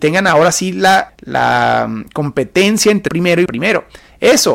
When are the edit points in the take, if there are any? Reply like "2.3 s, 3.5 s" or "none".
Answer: 1.1 s, 3.1 s, 3.5 s